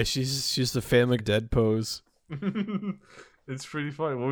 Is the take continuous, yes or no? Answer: no